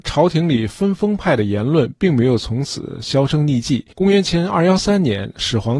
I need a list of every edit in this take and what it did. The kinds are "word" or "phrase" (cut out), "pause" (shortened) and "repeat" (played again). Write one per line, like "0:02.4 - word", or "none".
0:03.9 - pause